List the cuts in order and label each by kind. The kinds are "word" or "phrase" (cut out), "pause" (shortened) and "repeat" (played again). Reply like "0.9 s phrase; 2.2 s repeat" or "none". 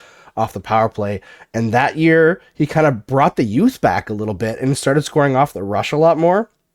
none